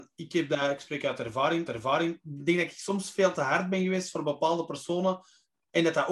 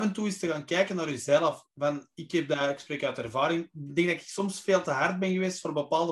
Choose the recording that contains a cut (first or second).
first